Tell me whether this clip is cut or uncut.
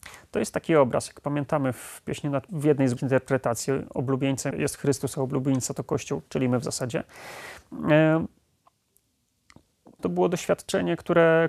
cut